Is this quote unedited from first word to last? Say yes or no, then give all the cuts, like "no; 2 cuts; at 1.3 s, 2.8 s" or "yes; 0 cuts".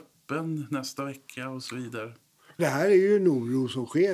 no; 1 cut; at 2.6 s